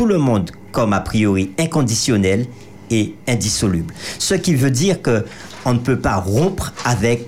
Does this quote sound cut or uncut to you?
uncut